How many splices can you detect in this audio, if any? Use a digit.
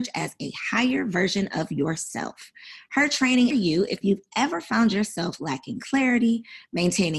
1